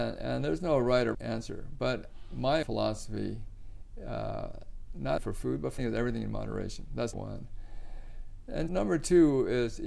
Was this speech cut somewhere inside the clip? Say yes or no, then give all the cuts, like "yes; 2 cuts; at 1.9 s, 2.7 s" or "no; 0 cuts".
yes; 6 cuts; at 1.1 s, 2.6 s, 5.2 s, 5.8 s, 7.1 s, 8.7 s